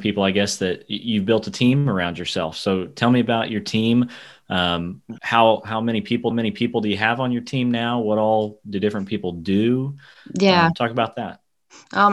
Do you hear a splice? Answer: yes; 1 cut; at 6.3 s

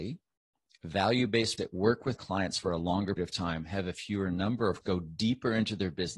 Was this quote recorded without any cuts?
no; 4 cuts; at 1.6 s, 2.1 s, 3.2 s, 4.8 s

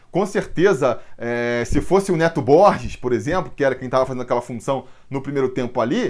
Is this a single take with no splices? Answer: yes; 0 cuts

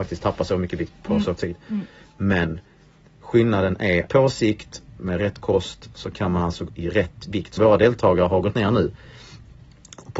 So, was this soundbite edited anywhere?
yes; 4 cuts; at 1.4 s, 4.1 s, 6.7 s, 7.6 s

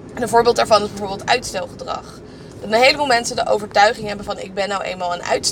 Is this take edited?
no; 0 cuts

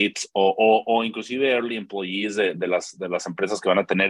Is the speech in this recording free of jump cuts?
yes; 0 cuts

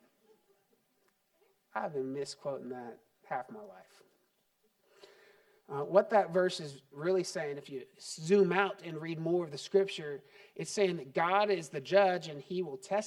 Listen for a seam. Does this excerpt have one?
no; 0 cuts

